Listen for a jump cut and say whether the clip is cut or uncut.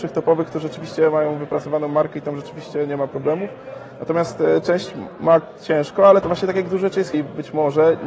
cut